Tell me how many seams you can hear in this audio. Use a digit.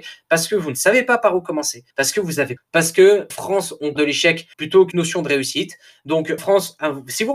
7